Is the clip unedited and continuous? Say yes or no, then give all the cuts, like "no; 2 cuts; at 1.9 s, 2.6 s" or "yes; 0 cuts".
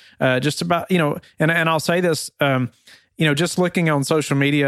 yes; 0 cuts